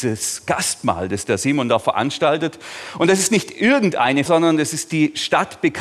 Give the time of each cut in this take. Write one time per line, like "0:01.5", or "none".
0:04.3